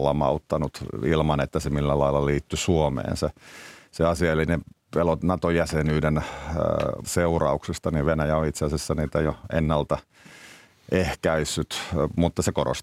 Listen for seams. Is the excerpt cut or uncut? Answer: cut